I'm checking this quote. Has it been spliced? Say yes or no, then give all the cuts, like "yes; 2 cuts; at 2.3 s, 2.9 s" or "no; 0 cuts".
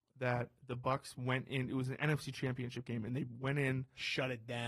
no; 0 cuts